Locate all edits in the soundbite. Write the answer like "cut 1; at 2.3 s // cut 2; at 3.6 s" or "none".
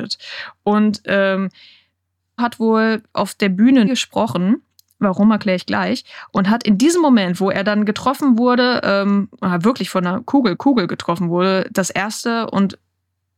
cut 1; at 2.4 s // cut 2; at 3.9 s // cut 3; at 10.6 s